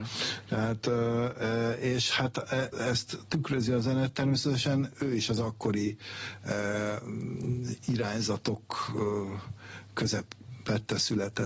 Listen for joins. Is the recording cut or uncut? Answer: cut